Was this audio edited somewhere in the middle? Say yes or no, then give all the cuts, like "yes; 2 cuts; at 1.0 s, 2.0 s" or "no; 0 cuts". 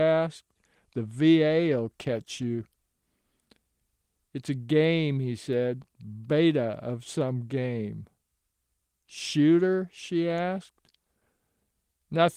no; 0 cuts